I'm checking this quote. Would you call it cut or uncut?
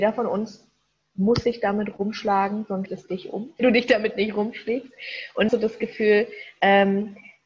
cut